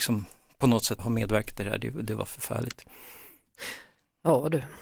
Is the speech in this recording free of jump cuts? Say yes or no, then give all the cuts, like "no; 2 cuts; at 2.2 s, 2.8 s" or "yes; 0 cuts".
no; 1 cut; at 1.0 s